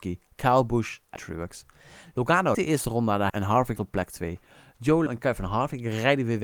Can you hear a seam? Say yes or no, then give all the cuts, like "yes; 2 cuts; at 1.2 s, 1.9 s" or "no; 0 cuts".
yes; 5 cuts; at 1.2 s, 2.5 s, 3.3 s, 3.8 s, 5.1 s